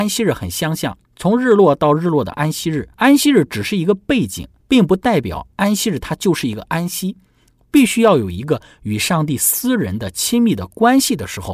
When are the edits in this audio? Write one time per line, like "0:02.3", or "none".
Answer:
0:01.1
0:02.9
0:04.6